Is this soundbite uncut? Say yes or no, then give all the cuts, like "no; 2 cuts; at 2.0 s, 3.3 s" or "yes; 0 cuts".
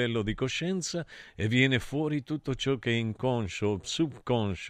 yes; 0 cuts